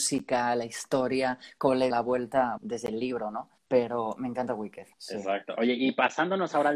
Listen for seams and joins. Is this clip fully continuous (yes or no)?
no